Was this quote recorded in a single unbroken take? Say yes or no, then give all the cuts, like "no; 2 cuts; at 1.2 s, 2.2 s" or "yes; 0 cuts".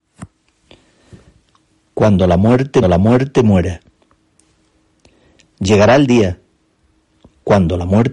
no; 1 cut; at 2.8 s